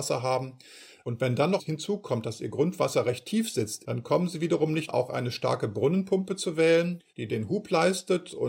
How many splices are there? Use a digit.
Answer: 2